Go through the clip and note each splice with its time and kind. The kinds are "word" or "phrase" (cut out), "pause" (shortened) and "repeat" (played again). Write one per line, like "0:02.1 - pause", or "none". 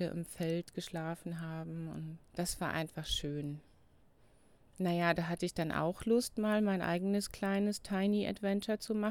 0:02.3 - pause